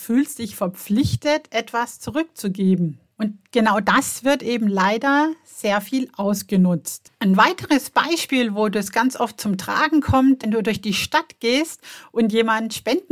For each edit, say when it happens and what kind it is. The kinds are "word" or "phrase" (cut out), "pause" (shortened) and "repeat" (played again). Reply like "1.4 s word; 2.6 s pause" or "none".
7.1 s pause; 10.4 s phrase